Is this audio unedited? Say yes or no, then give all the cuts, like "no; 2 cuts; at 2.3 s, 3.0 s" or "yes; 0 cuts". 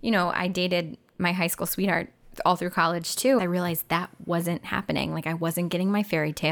no; 1 cut; at 3.4 s